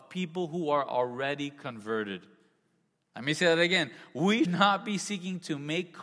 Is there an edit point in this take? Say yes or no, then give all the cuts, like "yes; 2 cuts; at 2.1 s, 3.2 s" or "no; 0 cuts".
yes; 1 cut; at 4.4 s